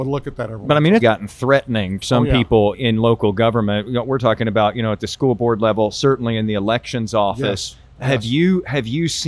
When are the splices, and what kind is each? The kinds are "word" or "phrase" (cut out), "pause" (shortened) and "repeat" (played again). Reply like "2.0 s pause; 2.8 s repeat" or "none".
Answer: 1.0 s word; 2.0 s word; 2.7 s word